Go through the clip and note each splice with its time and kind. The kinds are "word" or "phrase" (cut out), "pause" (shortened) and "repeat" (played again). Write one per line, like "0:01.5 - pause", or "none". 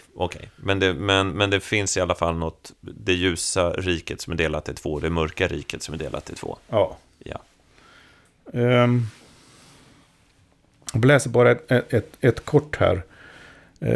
none

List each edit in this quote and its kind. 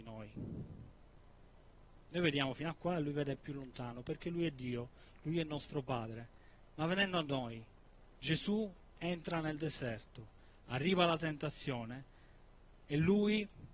none

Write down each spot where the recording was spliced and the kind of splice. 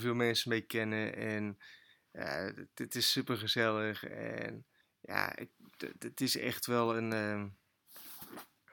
0:04.8 - pause

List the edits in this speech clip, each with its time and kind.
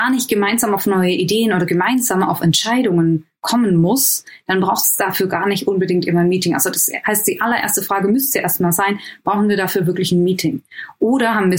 none

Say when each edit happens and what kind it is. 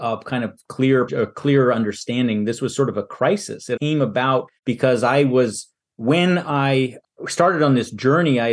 0:01.1 - word
0:03.8 - word
0:04.6 - pause
0:05.8 - pause
0:07.1 - pause

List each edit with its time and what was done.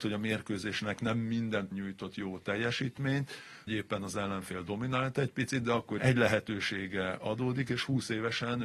0:01.7 - word
0:03.7 - word
0:06.0 - word

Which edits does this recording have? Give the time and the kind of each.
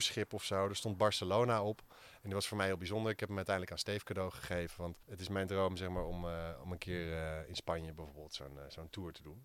0:05.0 - pause

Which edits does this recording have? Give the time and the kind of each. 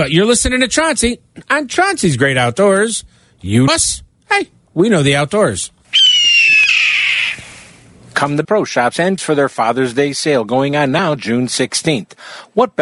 0:03.7 - word
0:08.4 - word
0:09.2 - word
0:11.2 - word

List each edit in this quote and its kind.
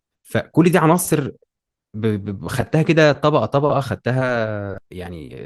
none

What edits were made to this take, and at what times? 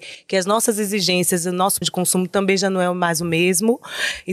0:01.8 - word

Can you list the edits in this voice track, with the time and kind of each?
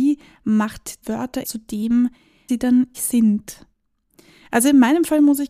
0:01.0 - word
0:01.4 - word
0:02.5 - word
0:02.9 - word

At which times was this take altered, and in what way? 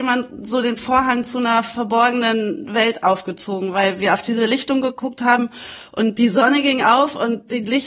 none

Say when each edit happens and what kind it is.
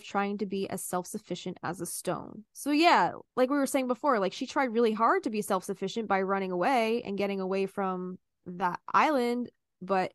0:03.3 - pause

